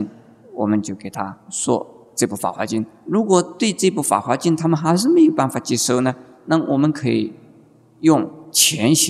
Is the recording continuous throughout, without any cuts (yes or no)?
yes